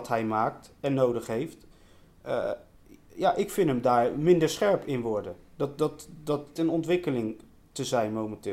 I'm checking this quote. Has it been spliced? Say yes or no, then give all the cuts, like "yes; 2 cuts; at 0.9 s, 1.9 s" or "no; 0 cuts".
yes; 1 cut; at 6.6 s